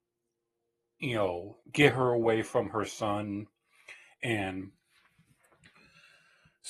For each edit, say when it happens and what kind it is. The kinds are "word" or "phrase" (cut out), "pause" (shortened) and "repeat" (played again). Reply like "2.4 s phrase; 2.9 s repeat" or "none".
1.6 s pause